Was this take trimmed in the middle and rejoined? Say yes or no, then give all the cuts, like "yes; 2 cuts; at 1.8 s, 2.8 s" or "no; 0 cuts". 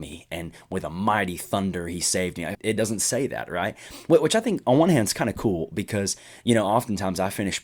yes; 1 cut; at 2.5 s